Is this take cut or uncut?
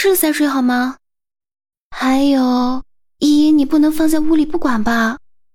uncut